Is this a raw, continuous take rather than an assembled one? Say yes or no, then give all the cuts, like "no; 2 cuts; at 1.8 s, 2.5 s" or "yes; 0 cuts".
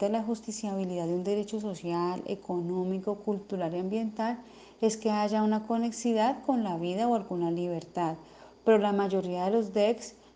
yes; 0 cuts